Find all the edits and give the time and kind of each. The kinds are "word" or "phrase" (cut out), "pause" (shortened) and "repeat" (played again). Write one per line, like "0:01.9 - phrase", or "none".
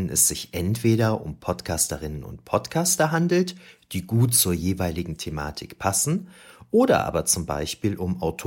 none